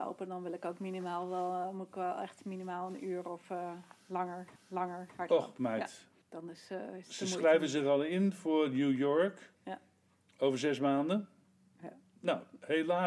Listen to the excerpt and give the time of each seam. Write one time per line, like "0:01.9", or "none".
0:04.6
0:06.2
0:09.6
0:11.4